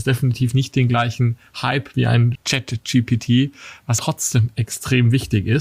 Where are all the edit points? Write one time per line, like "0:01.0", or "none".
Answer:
0:01.9
0:02.4
0:04.0